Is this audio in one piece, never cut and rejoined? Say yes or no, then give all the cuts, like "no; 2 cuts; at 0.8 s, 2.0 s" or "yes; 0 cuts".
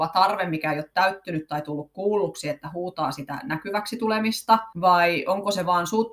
no; 1 cut; at 4.7 s